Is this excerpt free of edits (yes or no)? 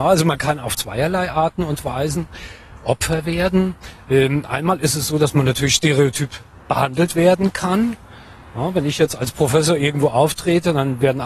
yes